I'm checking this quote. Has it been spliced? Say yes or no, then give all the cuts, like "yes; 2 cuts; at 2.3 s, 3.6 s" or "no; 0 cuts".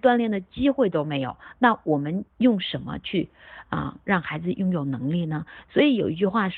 yes; 1 cut; at 2.3 s